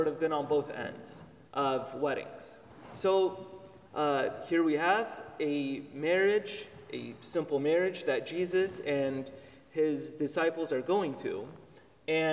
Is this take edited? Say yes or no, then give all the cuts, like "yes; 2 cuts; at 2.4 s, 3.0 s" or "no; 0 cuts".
yes; 2 cuts; at 1.5 s, 3.9 s